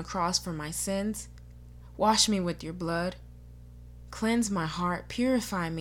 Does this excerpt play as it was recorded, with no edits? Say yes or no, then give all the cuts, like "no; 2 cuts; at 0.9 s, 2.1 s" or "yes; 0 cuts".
yes; 0 cuts